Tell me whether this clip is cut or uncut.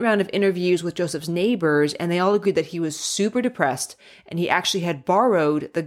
uncut